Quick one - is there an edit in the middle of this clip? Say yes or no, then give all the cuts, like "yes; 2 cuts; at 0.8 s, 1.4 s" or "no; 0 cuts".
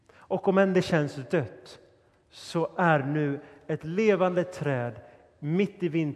no; 0 cuts